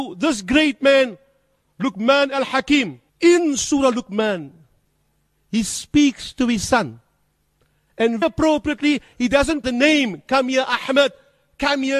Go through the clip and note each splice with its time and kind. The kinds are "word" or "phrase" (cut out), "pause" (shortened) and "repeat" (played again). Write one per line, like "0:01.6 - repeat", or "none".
0:03.1 - pause
0:08.2 - word
0:09.6 - phrase